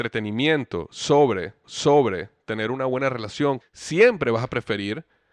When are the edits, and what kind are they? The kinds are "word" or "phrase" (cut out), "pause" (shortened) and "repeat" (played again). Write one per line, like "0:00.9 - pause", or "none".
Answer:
0:01.6 - repeat
0:03.6 - phrase